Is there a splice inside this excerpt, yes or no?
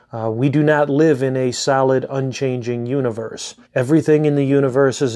yes